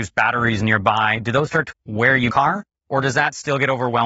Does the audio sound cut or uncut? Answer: cut